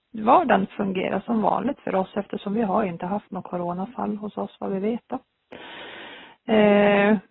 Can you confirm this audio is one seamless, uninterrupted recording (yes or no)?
yes